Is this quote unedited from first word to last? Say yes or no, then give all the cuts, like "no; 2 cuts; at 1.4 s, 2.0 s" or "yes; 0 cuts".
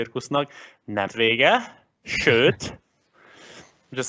no; 1 cut; at 1.1 s